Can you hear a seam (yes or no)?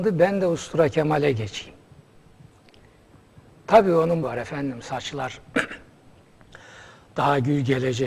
yes